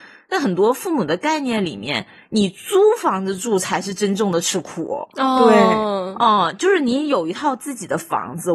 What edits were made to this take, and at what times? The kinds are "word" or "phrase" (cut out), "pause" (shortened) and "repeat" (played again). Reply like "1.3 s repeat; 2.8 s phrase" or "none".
none